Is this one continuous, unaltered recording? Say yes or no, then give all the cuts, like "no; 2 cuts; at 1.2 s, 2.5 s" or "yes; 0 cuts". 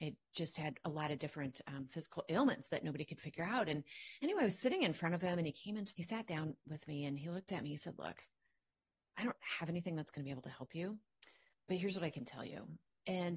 no; 1 cut; at 5.9 s